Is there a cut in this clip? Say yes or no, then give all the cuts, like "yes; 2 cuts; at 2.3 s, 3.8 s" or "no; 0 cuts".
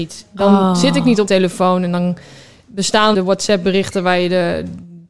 yes; 2 cuts; at 1.3 s, 3.1 s